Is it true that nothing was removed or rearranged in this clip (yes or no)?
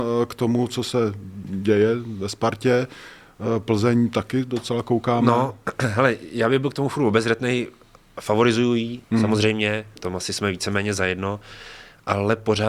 no